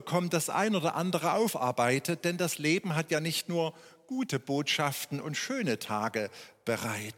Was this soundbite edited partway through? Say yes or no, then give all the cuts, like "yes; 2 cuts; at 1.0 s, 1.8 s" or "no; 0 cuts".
no; 0 cuts